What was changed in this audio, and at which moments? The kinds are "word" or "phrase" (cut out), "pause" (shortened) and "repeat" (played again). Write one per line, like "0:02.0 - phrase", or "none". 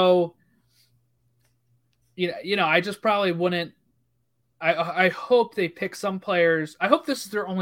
none